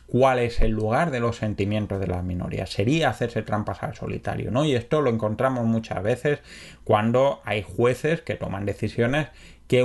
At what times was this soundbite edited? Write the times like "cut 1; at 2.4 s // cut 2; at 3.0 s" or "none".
none